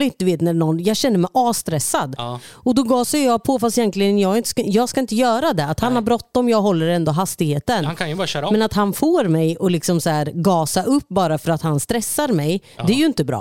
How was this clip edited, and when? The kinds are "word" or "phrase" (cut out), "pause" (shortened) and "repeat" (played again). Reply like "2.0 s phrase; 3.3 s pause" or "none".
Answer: none